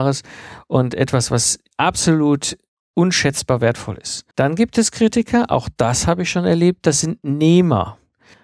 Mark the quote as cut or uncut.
cut